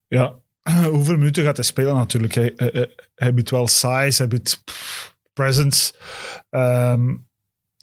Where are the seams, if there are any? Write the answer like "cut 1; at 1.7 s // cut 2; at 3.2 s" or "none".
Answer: none